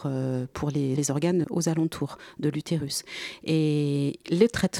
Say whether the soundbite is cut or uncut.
cut